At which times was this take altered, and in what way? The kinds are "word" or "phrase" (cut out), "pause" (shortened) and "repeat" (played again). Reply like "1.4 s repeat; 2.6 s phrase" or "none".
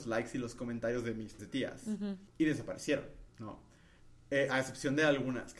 1.4 s word; 2.3 s pause; 3.3 s pause